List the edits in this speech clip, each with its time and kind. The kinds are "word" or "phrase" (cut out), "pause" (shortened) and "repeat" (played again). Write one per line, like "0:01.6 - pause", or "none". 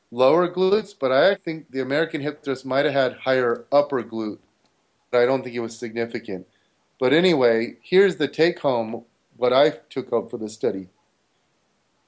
0:01.3 - word
0:05.1 - word
0:09.3 - word